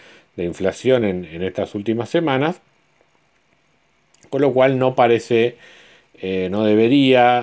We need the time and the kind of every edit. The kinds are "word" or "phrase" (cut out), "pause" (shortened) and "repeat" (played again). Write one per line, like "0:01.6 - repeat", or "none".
none